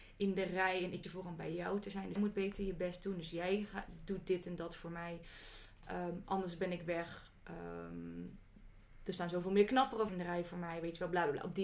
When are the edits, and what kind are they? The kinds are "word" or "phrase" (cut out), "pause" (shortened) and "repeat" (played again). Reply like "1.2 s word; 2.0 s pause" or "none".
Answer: 1.0 s word; 2.2 s word; 10.1 s word